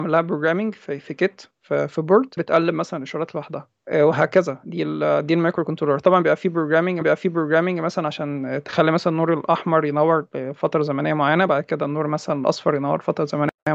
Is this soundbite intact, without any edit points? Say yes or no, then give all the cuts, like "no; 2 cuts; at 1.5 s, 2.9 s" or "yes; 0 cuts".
no; 3 cuts; at 2.4 s, 3.8 s, 7.0 s